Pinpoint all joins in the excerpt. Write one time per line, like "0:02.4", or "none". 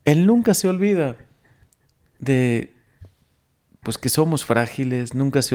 none